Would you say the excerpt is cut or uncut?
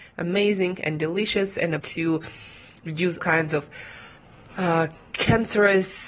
cut